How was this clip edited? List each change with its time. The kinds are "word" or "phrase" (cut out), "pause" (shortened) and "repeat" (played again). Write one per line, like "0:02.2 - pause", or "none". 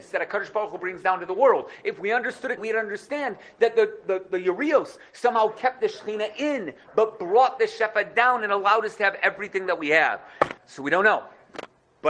0:02.6 - word
0:10.6 - pause